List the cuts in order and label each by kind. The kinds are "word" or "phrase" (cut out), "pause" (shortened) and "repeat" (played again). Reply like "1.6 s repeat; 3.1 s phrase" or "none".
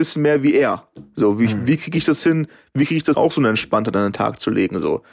3.1 s word